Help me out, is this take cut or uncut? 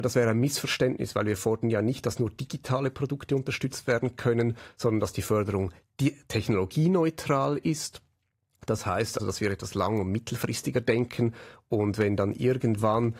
cut